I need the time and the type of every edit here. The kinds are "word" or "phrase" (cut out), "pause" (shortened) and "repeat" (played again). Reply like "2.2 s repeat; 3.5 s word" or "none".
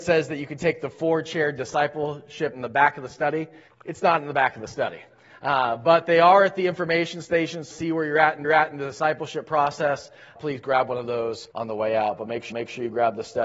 2.5 s word; 3.7 s pause; 7.7 s phrase; 8.4 s repeat; 10.4 s word; 11.5 s pause; 12.5 s repeat